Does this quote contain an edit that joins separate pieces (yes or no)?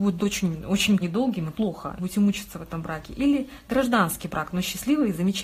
yes